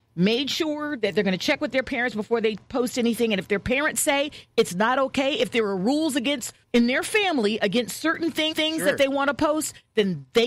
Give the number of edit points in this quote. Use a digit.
2